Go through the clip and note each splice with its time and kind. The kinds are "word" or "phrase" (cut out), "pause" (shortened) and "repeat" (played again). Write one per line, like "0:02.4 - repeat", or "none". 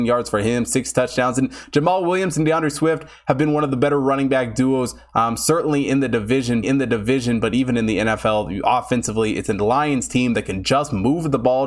0:06.6 - repeat